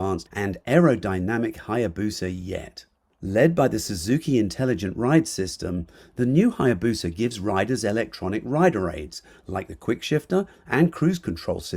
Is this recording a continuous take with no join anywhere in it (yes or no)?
yes